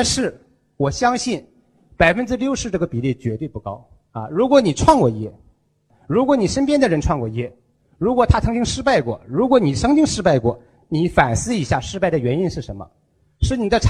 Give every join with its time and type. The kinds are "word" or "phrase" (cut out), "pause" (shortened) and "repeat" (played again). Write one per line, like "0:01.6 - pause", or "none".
none